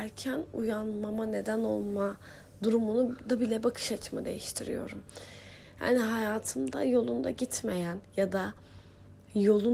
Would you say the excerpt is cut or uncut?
uncut